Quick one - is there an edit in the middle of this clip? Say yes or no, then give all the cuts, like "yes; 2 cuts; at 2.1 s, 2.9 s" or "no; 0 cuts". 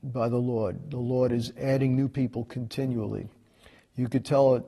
no; 0 cuts